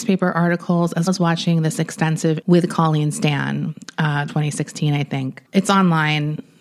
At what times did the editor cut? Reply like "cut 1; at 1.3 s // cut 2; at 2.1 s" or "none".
cut 1; at 1.1 s // cut 2; at 2.4 s // cut 3; at 4.3 s // cut 4; at 5.4 s